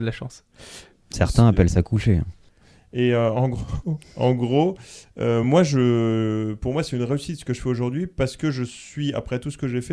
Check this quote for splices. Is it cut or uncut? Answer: uncut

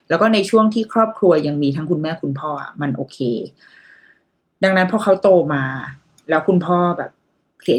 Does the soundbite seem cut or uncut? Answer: uncut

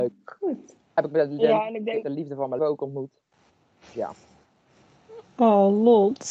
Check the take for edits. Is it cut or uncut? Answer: cut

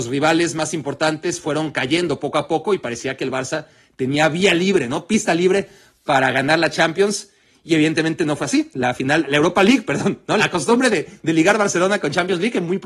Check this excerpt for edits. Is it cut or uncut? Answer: uncut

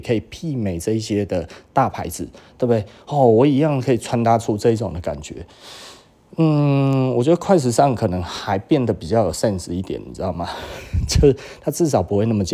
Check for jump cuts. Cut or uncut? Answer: uncut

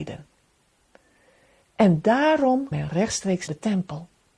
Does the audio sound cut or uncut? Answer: cut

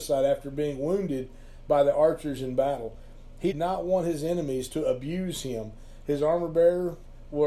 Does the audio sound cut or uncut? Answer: cut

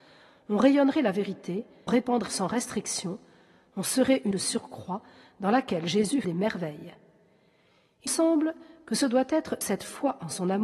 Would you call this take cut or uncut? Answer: cut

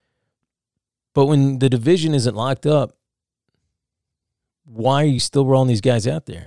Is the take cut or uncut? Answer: uncut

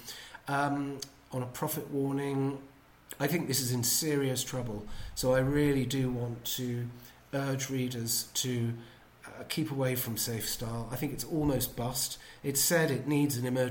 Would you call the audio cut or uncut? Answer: uncut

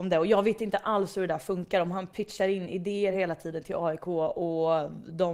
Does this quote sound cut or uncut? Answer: uncut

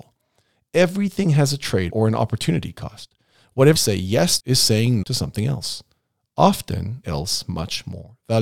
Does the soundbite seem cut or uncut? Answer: cut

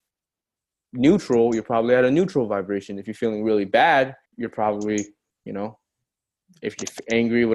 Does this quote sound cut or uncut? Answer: cut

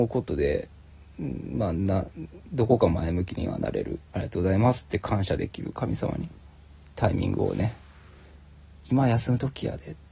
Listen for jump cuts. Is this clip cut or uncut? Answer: cut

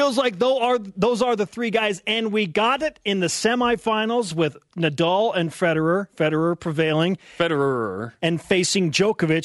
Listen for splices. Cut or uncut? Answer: uncut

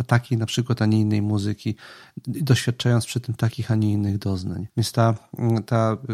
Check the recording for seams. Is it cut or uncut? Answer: cut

